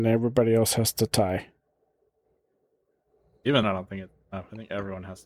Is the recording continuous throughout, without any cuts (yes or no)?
no